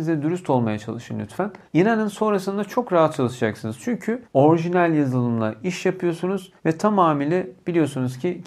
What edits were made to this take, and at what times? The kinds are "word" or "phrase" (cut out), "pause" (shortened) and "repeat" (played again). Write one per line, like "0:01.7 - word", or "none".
0:01.7 - pause
0:04.2 - pause
0:06.6 - pause

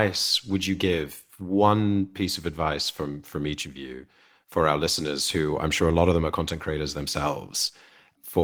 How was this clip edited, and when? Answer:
none

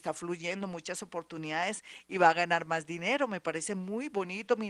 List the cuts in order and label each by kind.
none

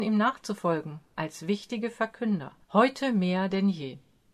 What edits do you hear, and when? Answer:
0:02.6 - pause

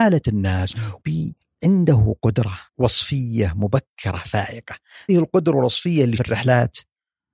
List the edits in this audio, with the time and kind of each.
0:01.0 - word
0:01.4 - pause
0:02.7 - pause
0:05.1 - word
0:06.2 - word

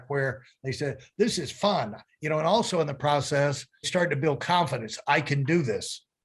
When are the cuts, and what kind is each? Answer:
0:03.8 - word

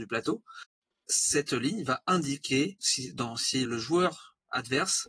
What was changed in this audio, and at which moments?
0:02.8 - word
0:03.6 - word

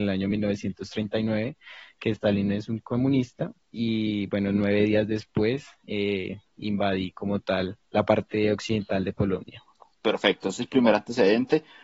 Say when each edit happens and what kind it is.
0:07.8 - pause
0:09.9 - pause

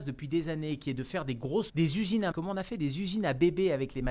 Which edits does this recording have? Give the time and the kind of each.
0:01.7 - word
0:02.3 - word

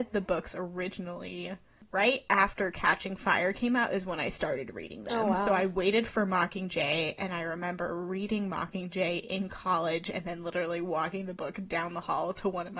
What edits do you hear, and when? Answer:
none

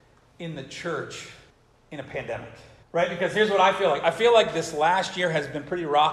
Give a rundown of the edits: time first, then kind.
0:01.5 - pause
0:02.8 - pause

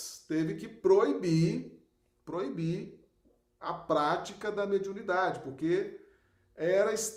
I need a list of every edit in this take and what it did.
none

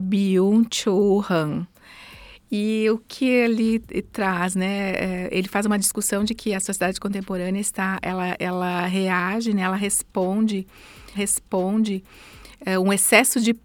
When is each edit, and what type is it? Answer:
0:03.0 - word
0:11.1 - repeat

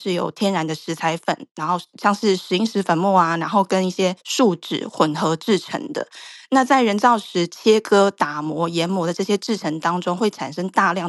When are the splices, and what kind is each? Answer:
0:04.2 - pause

